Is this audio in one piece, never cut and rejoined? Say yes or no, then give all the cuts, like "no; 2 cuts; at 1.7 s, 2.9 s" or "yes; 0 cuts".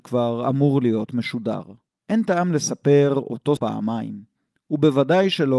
no; 2 cuts; at 2.0 s, 3.6 s